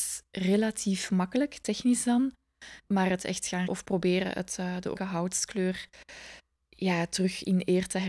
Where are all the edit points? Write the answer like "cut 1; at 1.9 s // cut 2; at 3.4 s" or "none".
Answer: cut 1; at 3.2 s // cut 2; at 3.7 s // cut 3; at 5.0 s